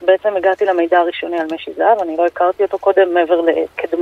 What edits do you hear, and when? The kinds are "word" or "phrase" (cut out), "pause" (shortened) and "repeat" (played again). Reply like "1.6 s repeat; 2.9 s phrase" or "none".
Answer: none